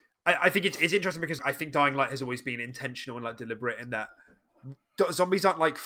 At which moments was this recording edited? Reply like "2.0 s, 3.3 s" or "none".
1.4 s